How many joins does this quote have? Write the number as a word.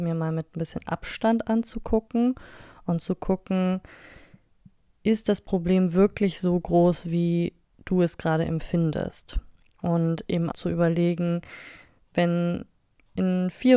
one